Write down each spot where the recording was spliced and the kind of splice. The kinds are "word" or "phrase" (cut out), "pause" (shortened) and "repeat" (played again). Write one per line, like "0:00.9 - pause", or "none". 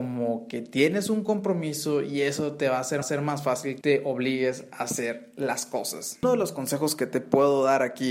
0:03.0 - repeat
0:03.8 - word
0:06.2 - word

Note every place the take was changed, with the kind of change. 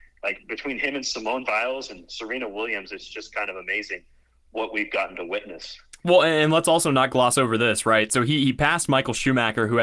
none

